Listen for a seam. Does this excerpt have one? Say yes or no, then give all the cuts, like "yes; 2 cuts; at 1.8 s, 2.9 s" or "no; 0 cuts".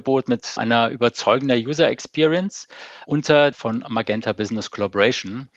yes; 1 cut; at 3.5 s